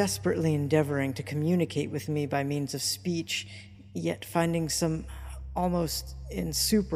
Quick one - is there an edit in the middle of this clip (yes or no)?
no